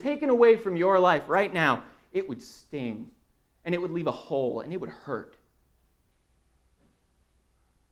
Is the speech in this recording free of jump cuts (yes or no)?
yes